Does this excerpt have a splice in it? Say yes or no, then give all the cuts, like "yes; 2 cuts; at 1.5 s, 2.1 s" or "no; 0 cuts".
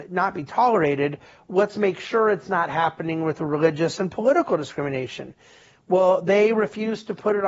no; 0 cuts